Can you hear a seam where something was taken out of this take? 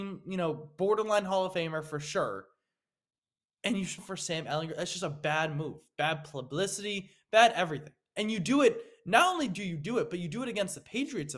yes; 1 cut; at 4.0 s

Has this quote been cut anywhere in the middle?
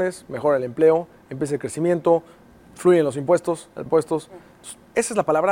yes; 1 cut; at 3.9 s

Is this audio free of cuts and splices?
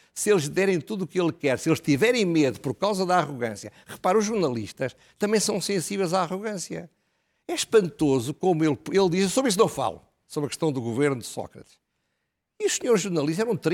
yes; 0 cuts

